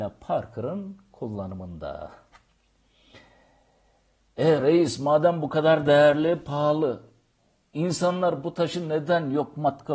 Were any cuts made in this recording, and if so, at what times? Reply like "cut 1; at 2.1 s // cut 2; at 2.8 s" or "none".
none